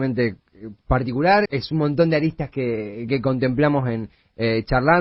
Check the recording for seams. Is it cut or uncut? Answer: cut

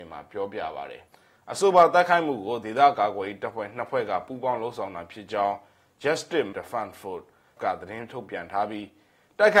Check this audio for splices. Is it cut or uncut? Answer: cut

